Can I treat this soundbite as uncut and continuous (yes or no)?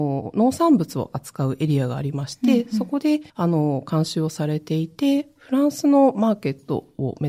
no